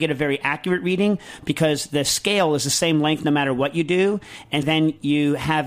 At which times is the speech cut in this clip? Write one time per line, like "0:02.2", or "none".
0:04.6